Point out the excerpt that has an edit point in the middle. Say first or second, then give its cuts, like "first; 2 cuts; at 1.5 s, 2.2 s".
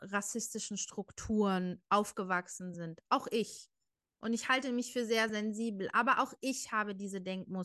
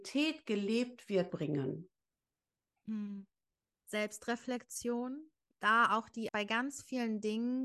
second; 3 cuts; at 1.3 s, 5.5 s, 6.3 s